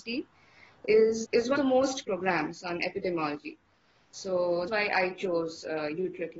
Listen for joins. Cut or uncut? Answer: cut